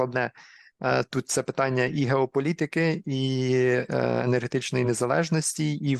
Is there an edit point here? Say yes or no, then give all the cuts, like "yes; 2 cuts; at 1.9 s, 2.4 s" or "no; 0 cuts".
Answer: no; 0 cuts